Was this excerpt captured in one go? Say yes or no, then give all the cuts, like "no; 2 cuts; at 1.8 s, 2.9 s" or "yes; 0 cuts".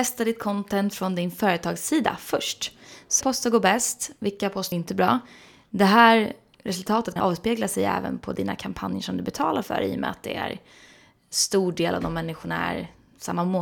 no; 3 cuts; at 3.2 s, 4.7 s, 7.2 s